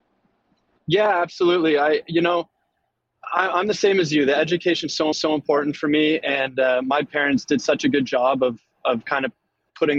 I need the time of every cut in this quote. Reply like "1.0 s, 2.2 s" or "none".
5.1 s